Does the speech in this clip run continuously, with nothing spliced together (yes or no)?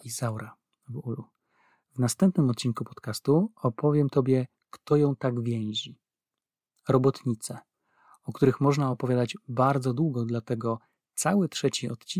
yes